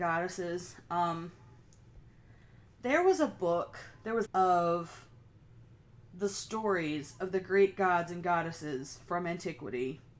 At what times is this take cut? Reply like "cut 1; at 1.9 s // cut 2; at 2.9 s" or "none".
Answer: cut 1; at 4.2 s

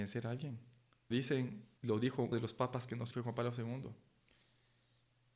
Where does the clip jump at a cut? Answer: cut 1; at 1.1 s // cut 2; at 1.8 s // cut 3; at 2.3 s // cut 4; at 3.1 s

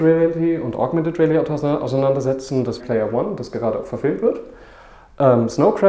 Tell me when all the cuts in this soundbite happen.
cut 1; at 2.8 s

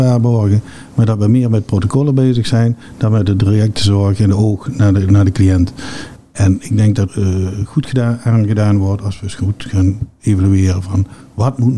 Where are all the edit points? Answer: cut 1; at 7.1 s

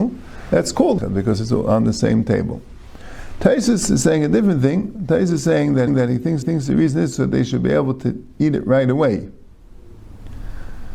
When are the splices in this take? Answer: cut 1; at 1.0 s // cut 2; at 5.9 s // cut 3; at 6.4 s

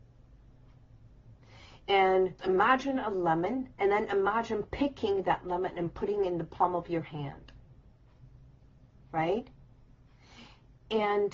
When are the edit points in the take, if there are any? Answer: cut 1; at 2.4 s // cut 2; at 3.7 s

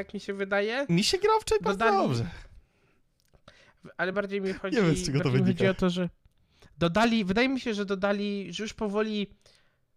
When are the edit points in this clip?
none

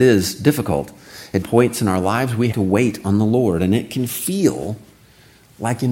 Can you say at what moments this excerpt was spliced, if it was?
cut 1; at 1.4 s // cut 2; at 2.5 s

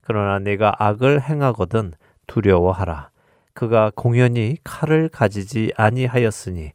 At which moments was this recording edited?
none

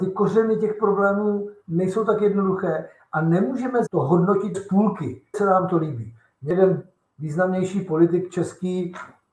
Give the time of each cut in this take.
cut 1; at 3.9 s // cut 2; at 4.5 s // cut 3; at 5.3 s

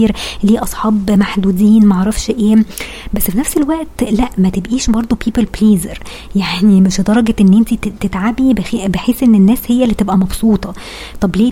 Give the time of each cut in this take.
none

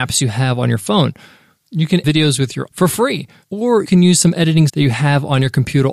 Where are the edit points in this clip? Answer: cut 1; at 2.0 s // cut 2; at 2.7 s // cut 3; at 3.8 s // cut 4; at 4.7 s

